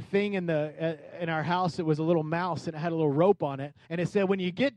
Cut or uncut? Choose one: cut